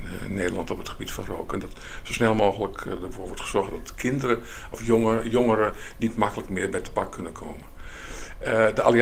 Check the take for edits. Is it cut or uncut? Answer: uncut